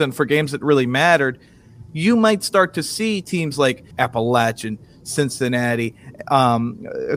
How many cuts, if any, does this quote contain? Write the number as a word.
one